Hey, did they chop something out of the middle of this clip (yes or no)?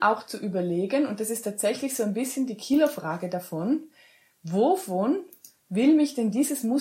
no